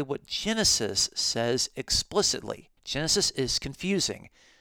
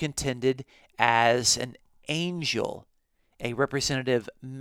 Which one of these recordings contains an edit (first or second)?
first